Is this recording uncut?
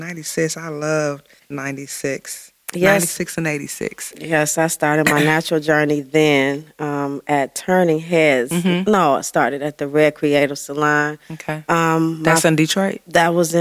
no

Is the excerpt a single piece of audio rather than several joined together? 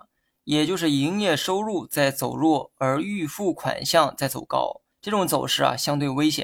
no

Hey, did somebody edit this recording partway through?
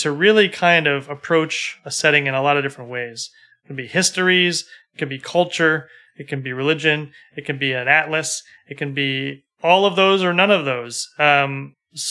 no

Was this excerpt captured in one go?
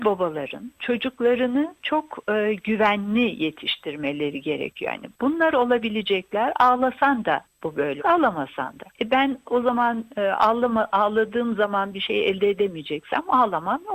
no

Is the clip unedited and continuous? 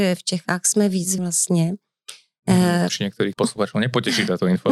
no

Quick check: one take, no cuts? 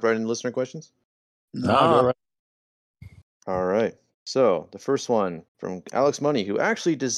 no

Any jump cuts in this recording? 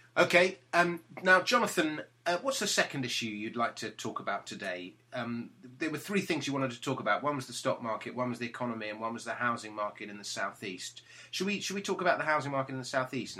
no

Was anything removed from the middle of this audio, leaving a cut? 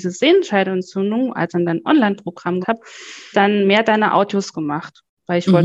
yes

